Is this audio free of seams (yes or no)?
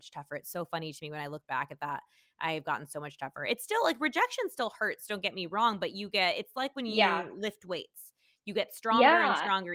yes